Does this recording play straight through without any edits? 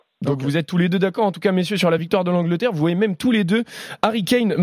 yes; 0 cuts

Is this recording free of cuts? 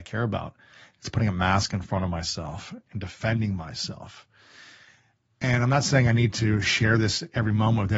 no; 1 cut; at 2.9 s

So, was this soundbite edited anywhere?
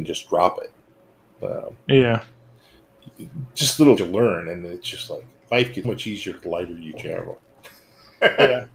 yes; 2 cuts; at 4.0 s, 5.8 s

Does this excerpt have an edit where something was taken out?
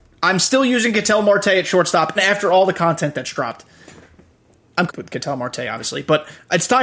yes; 2 cuts; at 2.2 s, 4.9 s

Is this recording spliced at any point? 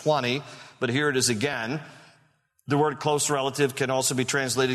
no; 0 cuts

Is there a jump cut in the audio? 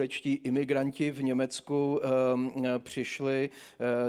no; 0 cuts

